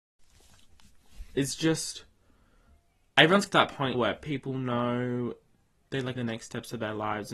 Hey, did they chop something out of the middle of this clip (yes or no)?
yes